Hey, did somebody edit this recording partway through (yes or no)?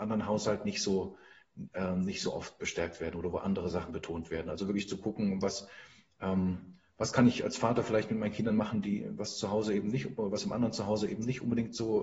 no